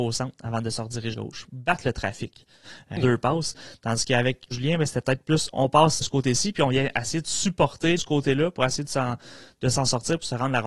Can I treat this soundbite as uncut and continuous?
no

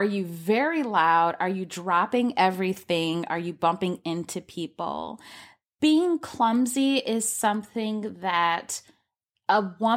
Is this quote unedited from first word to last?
yes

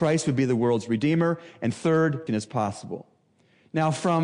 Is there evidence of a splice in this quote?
yes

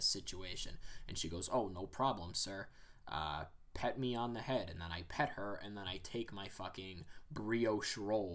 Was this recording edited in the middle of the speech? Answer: no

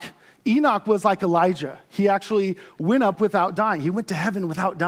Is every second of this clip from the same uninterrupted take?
yes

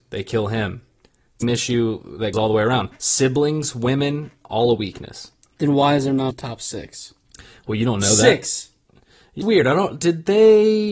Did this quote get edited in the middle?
yes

